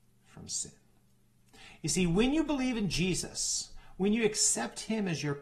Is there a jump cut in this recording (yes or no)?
no